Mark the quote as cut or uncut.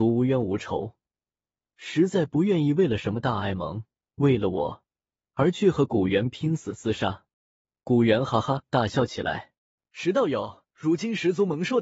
cut